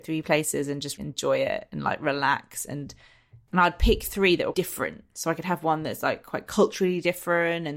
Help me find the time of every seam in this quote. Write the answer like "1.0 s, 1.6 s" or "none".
1.0 s, 3.5 s, 4.5 s